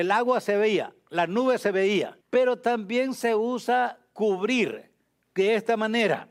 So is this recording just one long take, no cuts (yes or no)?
no